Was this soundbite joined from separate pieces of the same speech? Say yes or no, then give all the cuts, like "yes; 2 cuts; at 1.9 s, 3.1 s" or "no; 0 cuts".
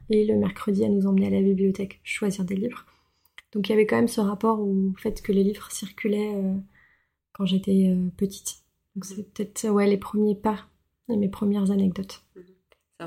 no; 0 cuts